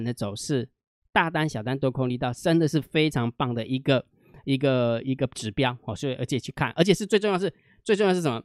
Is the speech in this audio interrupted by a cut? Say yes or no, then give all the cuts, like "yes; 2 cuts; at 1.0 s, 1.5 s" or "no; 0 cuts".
no; 0 cuts